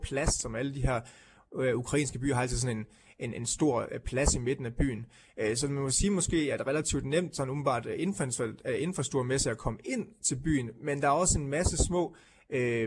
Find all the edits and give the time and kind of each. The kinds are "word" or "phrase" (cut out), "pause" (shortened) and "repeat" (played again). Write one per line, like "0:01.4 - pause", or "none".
none